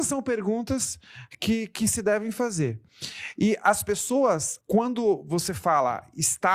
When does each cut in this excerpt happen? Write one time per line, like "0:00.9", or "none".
0:04.6